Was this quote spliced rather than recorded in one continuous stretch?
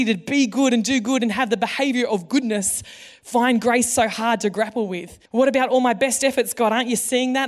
yes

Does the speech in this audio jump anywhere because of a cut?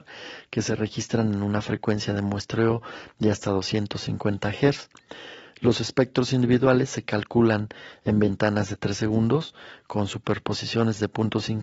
no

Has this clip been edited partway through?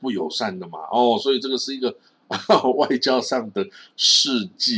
no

